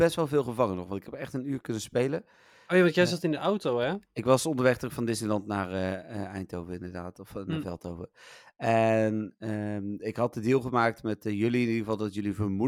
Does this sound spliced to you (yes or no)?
no